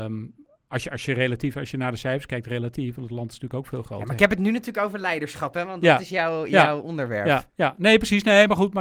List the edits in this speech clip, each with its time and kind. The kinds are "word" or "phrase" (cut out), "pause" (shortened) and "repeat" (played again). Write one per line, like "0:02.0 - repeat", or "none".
0:07.5 - pause